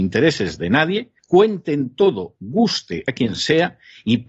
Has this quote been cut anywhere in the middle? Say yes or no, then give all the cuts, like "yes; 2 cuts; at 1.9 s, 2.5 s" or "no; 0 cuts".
yes; 2 cuts; at 1.2 s, 3.1 s